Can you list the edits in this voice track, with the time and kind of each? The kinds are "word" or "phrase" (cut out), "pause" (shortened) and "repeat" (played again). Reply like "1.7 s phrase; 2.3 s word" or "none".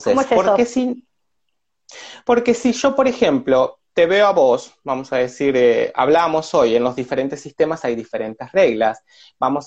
none